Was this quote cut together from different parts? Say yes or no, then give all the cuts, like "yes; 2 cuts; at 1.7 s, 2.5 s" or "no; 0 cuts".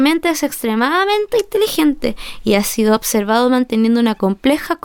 no; 0 cuts